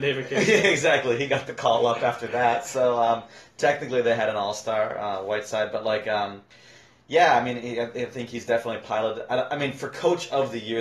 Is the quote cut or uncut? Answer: uncut